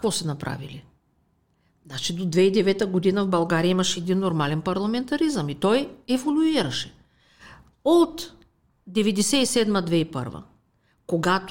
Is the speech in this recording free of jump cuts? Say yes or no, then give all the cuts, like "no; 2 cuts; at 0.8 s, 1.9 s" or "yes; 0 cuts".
yes; 0 cuts